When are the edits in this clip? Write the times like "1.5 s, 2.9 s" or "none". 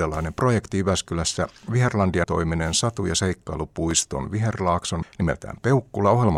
2.2 s, 5.0 s